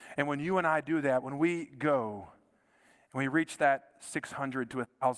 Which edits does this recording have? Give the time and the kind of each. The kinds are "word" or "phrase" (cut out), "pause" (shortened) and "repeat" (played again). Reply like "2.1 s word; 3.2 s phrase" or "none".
none